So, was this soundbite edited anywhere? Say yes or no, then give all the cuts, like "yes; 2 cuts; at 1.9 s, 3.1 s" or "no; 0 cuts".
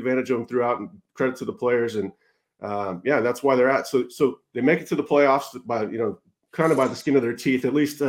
no; 0 cuts